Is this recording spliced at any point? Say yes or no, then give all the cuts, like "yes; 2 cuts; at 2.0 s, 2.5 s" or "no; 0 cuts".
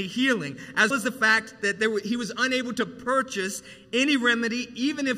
yes; 1 cut; at 0.9 s